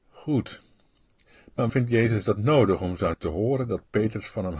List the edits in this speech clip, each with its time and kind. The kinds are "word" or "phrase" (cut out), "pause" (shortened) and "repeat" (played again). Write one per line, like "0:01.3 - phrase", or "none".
0:01.7 - word
0:03.1 - word